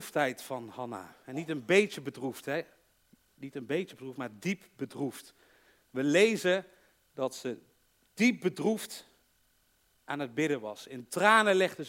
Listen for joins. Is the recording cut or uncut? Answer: uncut